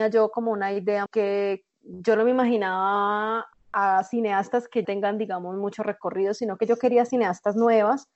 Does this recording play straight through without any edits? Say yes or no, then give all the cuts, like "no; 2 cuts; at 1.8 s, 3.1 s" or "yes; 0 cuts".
no; 3 cuts; at 1.1 s, 3.5 s, 4.8 s